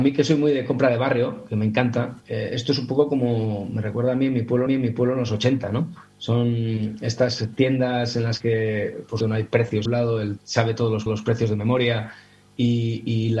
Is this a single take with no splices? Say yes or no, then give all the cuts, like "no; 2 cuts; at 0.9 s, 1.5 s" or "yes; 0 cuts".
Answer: no; 6 cuts; at 2.2 s, 4.7 s, 9.2 s, 9.9 s, 10.4 s, 11.1 s